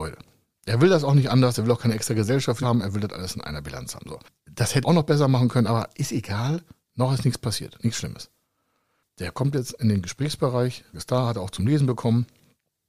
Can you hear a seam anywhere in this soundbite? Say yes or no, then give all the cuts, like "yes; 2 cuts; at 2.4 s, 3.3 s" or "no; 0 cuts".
yes; 3 cuts; at 2.6 s, 4.8 s, 10.9 s